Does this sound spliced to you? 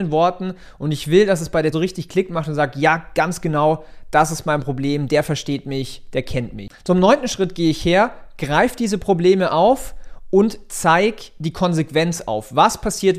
yes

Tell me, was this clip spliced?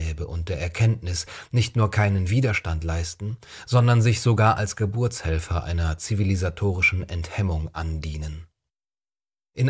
no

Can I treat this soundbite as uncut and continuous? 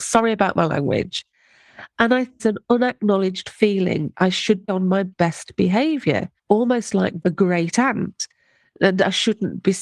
no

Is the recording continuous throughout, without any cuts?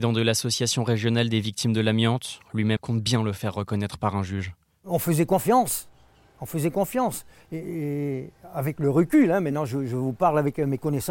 no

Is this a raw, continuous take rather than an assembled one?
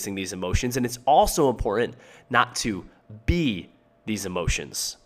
yes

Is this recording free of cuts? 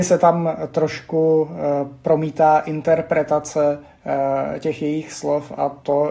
yes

